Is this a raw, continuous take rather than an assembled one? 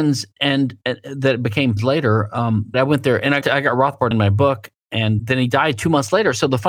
no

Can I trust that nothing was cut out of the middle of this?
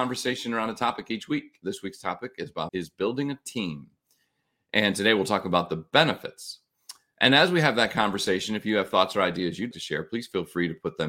no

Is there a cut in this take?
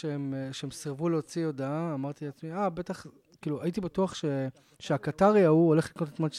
no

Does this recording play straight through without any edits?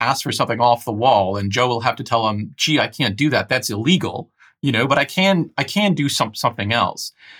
yes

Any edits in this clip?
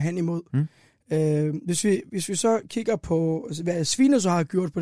no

